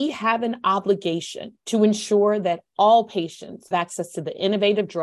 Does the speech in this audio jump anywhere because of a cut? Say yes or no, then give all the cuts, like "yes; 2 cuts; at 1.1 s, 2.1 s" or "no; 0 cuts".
yes; 2 cuts; at 1.6 s, 3.7 s